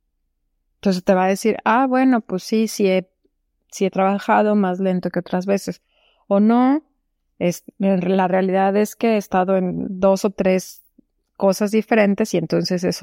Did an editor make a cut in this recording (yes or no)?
no